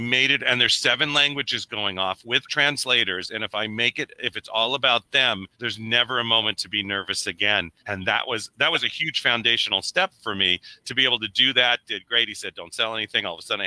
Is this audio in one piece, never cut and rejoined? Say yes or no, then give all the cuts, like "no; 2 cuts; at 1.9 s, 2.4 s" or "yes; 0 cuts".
no; 2 cuts; at 5.5 s, 7.8 s